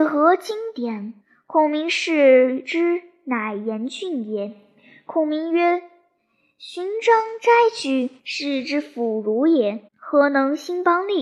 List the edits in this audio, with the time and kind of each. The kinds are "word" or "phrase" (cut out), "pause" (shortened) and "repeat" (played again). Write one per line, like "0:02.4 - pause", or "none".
0:01.2 - pause
0:08.2 - pause
0:09.9 - pause